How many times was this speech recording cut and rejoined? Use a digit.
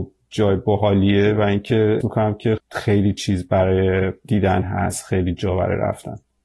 2